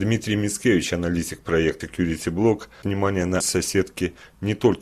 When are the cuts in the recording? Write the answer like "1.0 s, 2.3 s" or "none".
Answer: 1.8 s, 2.8 s, 3.4 s